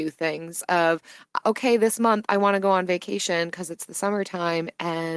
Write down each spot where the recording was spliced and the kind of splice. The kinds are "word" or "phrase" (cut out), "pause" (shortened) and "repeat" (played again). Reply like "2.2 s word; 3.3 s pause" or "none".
1.4 s word